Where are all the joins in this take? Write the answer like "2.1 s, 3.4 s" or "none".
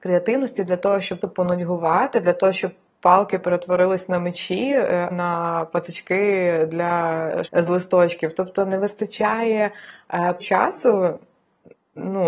1.2 s, 5.1 s, 7.5 s, 10.4 s